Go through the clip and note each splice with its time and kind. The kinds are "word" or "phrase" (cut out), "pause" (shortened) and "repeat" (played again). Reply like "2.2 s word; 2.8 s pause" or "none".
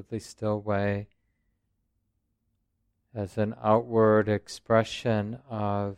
none